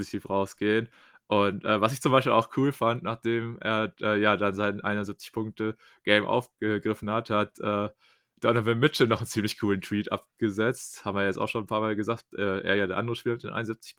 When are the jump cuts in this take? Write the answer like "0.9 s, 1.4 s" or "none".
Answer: none